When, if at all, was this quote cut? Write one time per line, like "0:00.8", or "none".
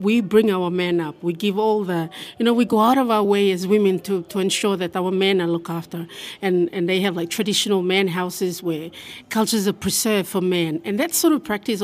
none

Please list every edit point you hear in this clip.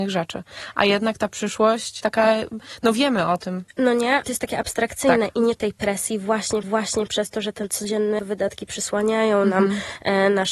0:02.0
0:04.2
0:05.6
0:06.6
0:08.2

